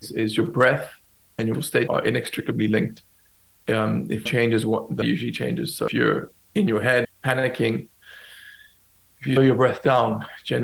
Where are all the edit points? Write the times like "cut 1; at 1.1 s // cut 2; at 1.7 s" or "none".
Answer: cut 1; at 1.5 s // cut 2; at 1.9 s // cut 3; at 4.3 s // cut 4; at 5.0 s // cut 5; at 5.9 s // cut 6; at 7.0 s // cut 7; at 9.4 s

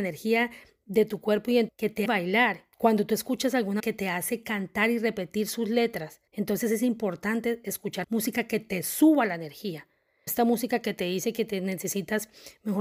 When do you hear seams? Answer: cut 1; at 1.7 s // cut 2; at 2.1 s // cut 3; at 2.7 s // cut 4; at 3.8 s // cut 5; at 6.3 s // cut 6; at 8.0 s // cut 7; at 10.3 s

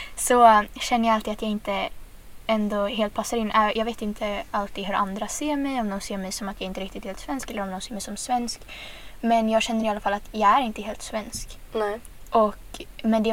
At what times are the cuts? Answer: none

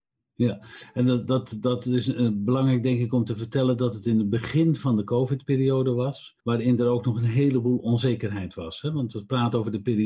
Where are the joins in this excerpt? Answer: cut 1; at 6.4 s

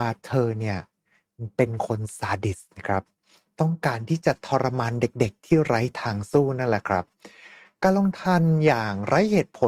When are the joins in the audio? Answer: none

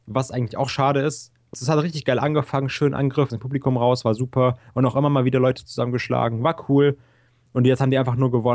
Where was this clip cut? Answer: cut 1; at 1.5 s // cut 2; at 3.3 s

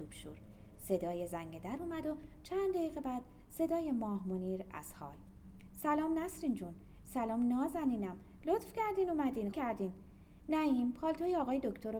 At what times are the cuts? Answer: cut 1; at 9.5 s

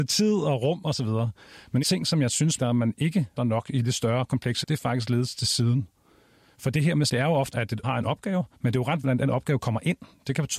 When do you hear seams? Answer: cut 1; at 1.8 s // cut 2; at 2.6 s // cut 3; at 3.4 s // cut 4; at 4.6 s // cut 5; at 7.1 s // cut 6; at 7.5 s // cut 7; at 7.8 s // cut 8; at 8.5 s // cut 9; at 9.0 s

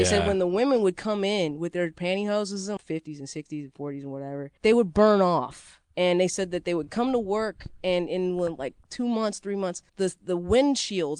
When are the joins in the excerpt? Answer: cut 1; at 2.8 s // cut 2; at 4.6 s // cut 3; at 5.8 s // cut 4; at 9.9 s

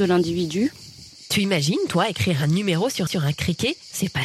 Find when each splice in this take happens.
cut 1; at 3.1 s

